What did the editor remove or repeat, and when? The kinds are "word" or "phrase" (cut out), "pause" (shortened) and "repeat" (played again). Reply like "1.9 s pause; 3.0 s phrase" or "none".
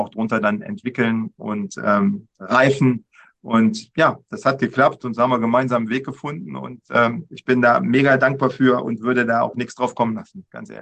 none